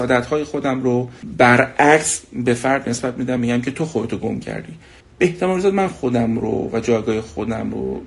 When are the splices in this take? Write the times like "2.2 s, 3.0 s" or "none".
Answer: none